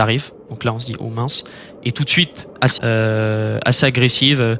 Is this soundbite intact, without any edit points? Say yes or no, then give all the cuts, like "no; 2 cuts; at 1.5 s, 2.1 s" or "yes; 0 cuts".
no; 1 cut; at 2.8 s